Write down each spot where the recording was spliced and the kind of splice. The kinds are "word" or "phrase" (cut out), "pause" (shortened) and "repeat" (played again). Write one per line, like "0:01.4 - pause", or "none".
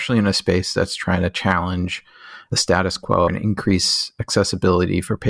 0:03.3 - phrase